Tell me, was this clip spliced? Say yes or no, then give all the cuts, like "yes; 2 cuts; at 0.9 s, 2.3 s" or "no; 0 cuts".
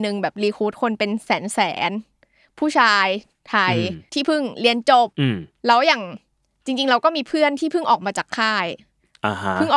yes; 2 cuts; at 4.1 s, 5.1 s